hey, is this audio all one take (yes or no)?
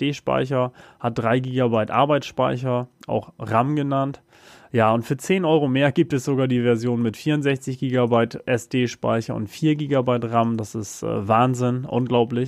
yes